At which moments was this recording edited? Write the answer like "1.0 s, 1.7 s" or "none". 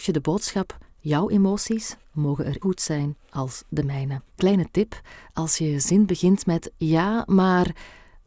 2.6 s, 4.3 s